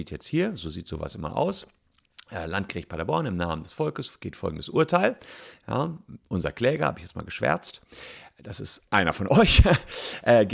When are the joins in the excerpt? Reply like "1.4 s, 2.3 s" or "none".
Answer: 8.9 s